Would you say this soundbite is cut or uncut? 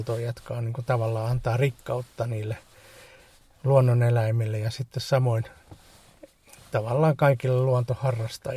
uncut